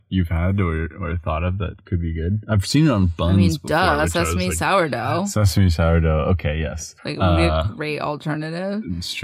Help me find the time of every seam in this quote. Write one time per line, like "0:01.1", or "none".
0:07.0